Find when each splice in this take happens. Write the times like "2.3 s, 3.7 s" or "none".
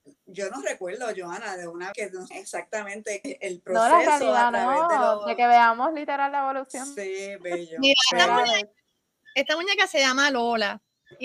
1.9 s, 2.3 s, 3.2 s, 8.1 s